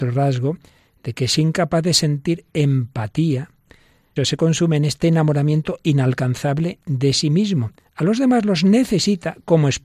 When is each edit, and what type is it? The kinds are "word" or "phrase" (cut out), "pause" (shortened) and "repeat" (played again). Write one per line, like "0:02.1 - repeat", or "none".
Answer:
0:04.2 - word